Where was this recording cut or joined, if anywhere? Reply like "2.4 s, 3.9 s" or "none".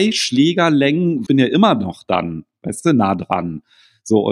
1.3 s